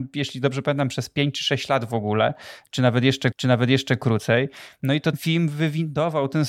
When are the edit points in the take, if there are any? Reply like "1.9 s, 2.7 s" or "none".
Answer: 3.3 s, 5.1 s